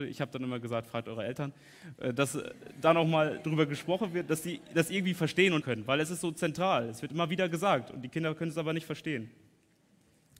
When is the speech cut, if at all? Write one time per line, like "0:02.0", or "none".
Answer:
0:05.6